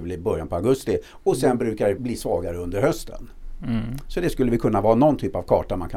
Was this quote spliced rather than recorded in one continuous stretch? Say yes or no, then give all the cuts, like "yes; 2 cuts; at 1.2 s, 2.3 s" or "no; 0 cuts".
yes; 1 cut; at 2.0 s